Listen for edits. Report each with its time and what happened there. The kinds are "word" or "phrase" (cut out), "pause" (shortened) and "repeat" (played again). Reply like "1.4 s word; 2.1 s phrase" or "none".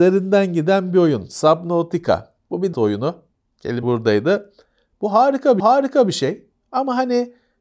2.7 s word; 3.8 s word; 5.6 s repeat

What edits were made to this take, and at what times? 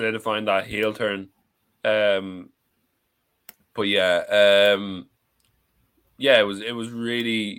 none

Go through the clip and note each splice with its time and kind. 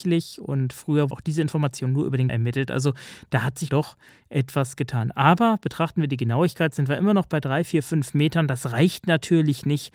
1.1 s word; 2.3 s word; 3.7 s word

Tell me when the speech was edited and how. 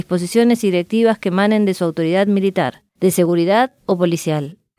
none

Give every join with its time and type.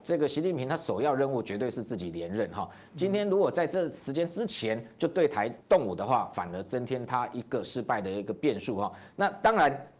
5.6 s pause

